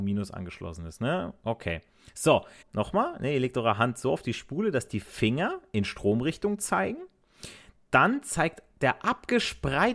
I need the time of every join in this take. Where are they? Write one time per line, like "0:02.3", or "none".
0:02.6